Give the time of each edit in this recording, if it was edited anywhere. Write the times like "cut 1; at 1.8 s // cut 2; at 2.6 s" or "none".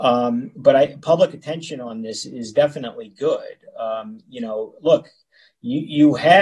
none